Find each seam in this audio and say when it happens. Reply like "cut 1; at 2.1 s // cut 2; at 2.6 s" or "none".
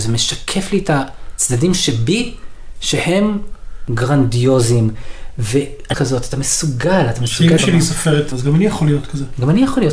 cut 1; at 5.9 s // cut 2; at 7.6 s // cut 3; at 8.3 s